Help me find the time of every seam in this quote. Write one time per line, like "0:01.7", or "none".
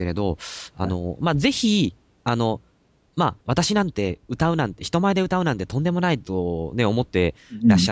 0:03.4

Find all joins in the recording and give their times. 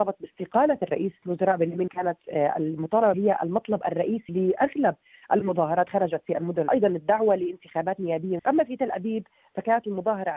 0:01.2
0:01.9
0:03.1
0:04.3
0:05.9
0:06.7
0:08.4

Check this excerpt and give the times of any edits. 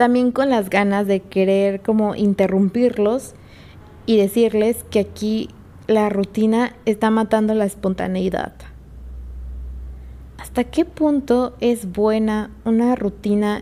none

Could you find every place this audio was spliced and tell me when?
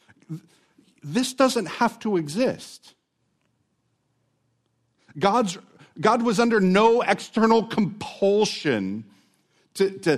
none

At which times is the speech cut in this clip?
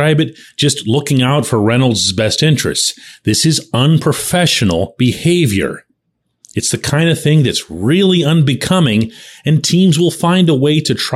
none

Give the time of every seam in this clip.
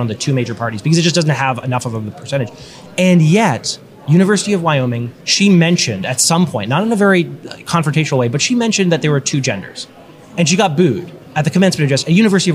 0:05.2

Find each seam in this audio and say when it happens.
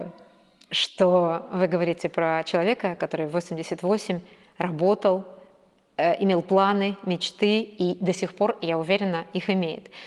none

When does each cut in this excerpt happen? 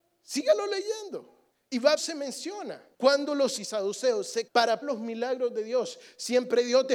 0:01.5
0:02.0
0:02.9
0:03.6
0:04.5
0:04.8

